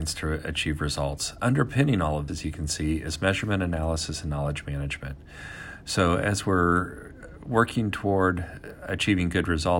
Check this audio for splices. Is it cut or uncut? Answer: cut